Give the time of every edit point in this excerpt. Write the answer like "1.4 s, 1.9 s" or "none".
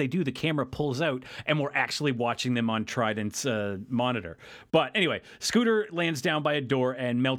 none